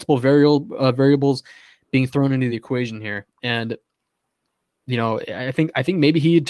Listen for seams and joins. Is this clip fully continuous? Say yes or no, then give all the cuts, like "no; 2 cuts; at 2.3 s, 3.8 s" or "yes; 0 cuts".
yes; 0 cuts